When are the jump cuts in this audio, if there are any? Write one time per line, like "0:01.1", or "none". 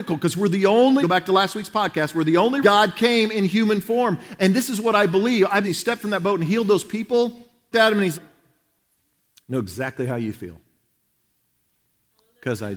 0:01.0
0:02.6
0:05.6
0:07.7
0:08.1